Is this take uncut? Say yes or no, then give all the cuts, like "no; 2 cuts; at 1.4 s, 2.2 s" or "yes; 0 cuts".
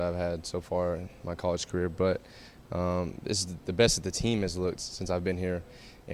no; 1 cut; at 4.8 s